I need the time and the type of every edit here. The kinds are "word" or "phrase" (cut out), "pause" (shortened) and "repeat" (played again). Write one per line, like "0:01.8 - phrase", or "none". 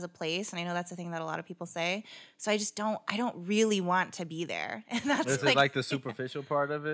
none